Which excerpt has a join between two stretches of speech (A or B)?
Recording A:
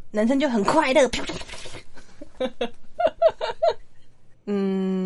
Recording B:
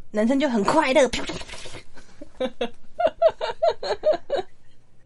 A